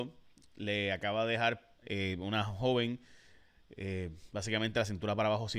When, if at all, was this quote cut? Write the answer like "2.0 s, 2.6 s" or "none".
1.8 s